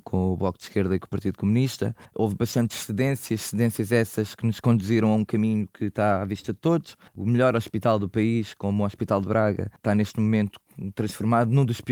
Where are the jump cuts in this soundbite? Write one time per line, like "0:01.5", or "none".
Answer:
0:02.0
0:07.1
0:09.8